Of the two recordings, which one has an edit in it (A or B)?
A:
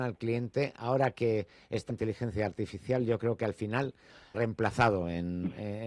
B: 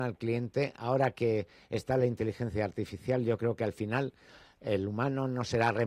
A